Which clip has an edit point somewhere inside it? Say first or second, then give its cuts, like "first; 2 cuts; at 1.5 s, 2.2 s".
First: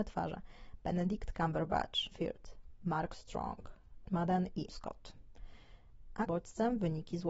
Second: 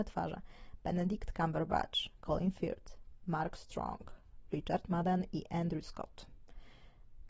first; 4 cuts; at 2.1 s, 4.1 s, 4.7 s, 6.3 s